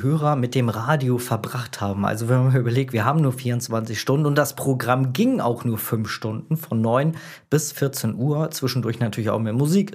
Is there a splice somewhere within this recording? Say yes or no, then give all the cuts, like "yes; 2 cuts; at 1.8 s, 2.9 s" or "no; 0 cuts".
no; 0 cuts